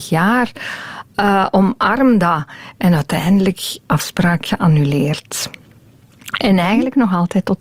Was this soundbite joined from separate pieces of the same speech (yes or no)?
yes